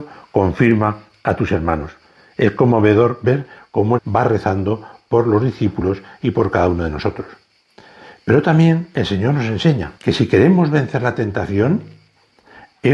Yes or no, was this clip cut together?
yes